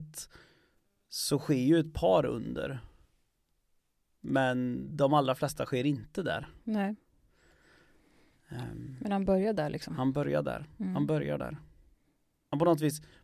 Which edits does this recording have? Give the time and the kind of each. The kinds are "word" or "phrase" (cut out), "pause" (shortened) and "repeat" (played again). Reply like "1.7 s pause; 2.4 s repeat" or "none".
none

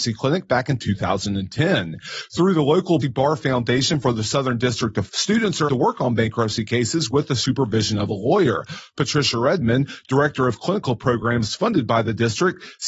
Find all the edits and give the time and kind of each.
3.0 s word; 5.1 s word; 5.7 s word

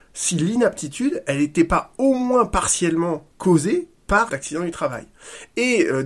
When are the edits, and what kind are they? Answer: 3.3 s pause; 4.3 s word

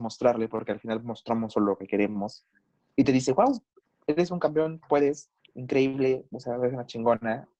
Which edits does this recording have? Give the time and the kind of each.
none

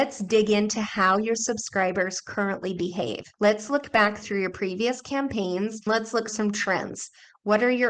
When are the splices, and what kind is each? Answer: 3.3 s pause; 5.9 s word; 6.3 s word

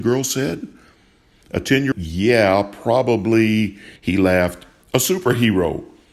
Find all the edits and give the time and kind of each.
1.9 s phrase; 4.0 s pause

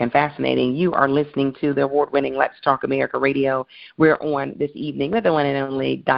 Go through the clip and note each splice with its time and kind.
none

